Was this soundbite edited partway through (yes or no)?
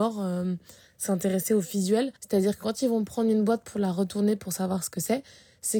yes